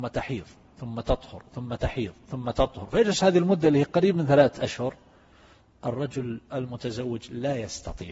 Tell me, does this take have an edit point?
no; 0 cuts

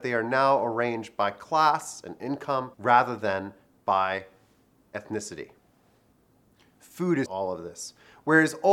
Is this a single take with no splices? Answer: no; 2 cuts; at 2.7 s, 7.3 s

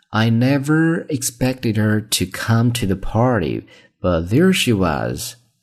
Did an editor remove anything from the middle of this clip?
no; 0 cuts

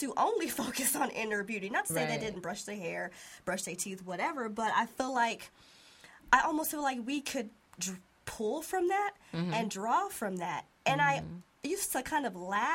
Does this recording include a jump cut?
no; 0 cuts

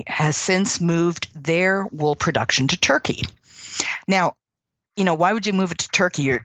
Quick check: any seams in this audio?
no; 0 cuts

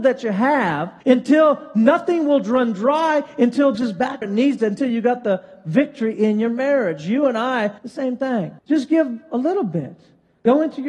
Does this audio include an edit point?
yes; 5 cuts; at 1.0 s, 3.7 s, 4.2 s, 7.8 s, 8.6 s

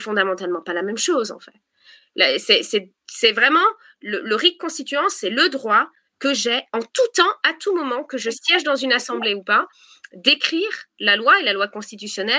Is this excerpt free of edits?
yes; 0 cuts

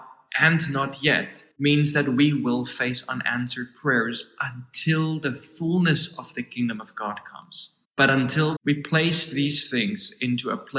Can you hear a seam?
yes; 3 cuts; at 1.5 s, 7.8 s, 8.6 s

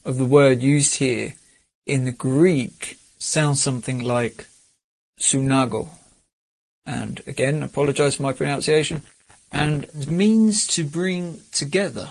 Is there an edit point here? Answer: no; 0 cuts

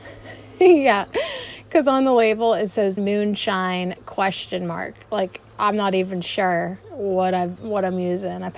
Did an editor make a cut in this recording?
yes; 1 cut; at 3.0 s

